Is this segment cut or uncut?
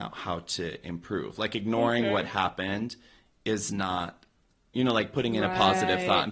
uncut